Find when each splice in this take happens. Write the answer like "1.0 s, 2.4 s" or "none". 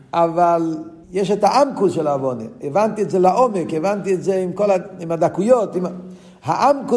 1.0 s